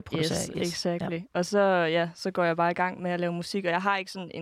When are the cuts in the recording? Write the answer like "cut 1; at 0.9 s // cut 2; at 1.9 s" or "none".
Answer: none